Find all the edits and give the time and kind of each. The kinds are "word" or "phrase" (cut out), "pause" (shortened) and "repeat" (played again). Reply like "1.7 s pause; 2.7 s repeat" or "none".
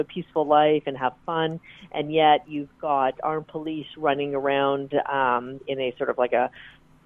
none